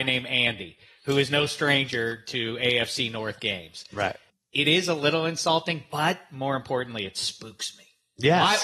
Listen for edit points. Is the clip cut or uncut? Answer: cut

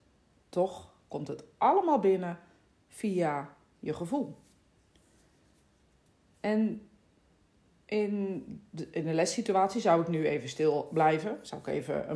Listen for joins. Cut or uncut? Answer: uncut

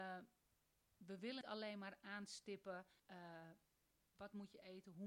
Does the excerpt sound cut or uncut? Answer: cut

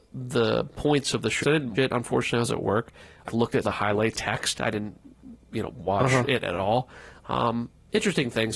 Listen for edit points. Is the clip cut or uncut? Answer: cut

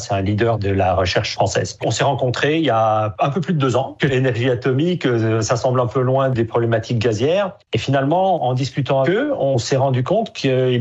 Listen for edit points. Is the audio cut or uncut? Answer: cut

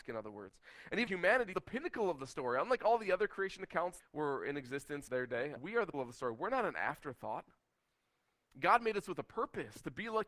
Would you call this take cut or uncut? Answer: cut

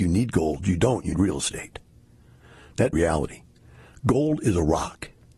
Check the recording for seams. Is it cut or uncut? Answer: cut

